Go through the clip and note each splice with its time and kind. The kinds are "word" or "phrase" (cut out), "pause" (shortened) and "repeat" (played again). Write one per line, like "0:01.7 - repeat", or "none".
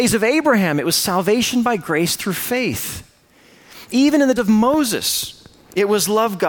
0:04.4 - word